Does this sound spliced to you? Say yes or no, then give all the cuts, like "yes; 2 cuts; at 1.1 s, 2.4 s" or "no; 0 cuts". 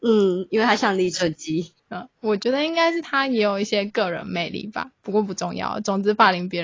yes; 1 cut; at 1.8 s